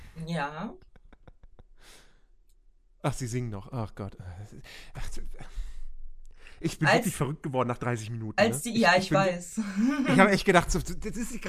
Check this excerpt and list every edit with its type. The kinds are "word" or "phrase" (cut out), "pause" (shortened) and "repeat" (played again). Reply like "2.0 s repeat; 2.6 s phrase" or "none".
6.8 s word